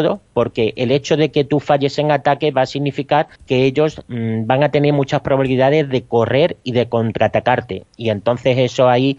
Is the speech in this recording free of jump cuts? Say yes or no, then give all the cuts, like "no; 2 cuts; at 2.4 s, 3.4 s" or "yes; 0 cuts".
no; 1 cut; at 3.4 s